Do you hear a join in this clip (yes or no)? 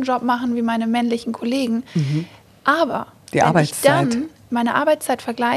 no